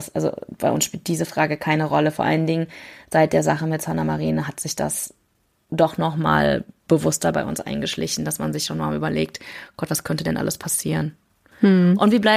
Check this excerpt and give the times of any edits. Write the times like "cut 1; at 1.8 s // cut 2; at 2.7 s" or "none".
none